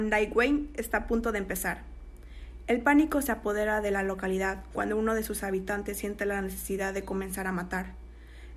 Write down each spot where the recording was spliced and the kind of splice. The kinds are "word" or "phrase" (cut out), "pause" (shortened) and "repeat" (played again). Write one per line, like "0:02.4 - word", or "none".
none